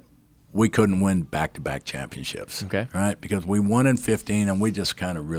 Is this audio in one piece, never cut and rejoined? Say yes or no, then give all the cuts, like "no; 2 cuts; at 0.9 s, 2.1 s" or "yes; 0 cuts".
yes; 0 cuts